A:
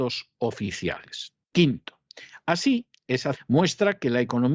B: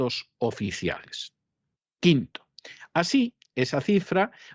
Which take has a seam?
A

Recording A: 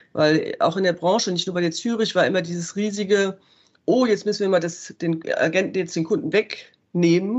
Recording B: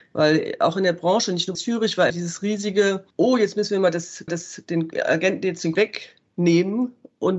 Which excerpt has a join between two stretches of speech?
B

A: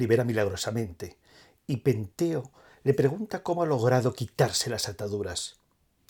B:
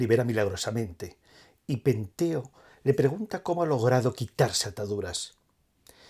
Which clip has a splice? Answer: B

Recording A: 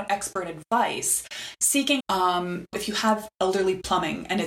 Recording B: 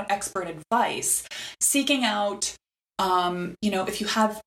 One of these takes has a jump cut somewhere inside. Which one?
A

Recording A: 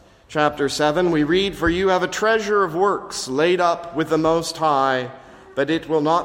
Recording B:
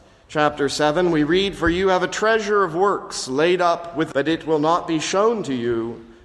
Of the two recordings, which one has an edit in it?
B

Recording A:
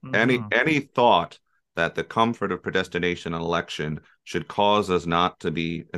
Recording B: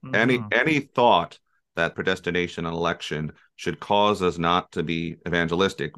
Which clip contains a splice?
B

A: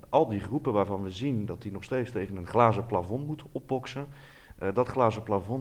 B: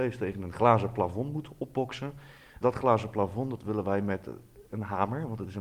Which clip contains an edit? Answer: B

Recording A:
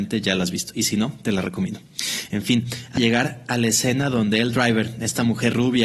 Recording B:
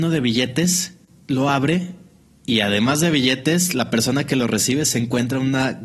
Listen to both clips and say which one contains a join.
A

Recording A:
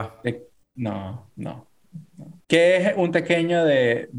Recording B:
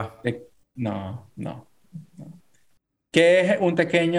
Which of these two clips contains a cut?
A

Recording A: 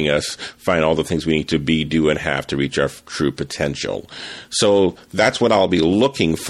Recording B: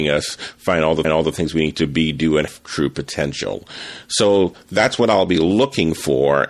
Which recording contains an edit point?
B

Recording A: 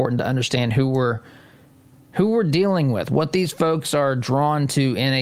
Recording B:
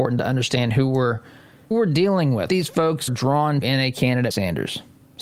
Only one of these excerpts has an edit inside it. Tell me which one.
B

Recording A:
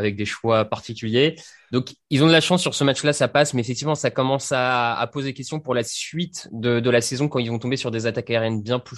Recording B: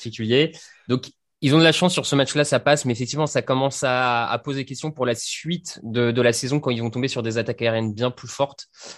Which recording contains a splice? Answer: A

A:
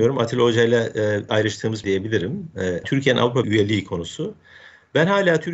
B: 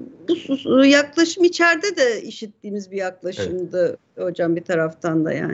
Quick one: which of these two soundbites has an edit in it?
A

